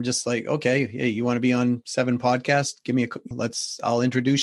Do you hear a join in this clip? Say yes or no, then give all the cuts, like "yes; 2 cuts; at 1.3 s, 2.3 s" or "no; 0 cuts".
yes; 1 cut; at 3.3 s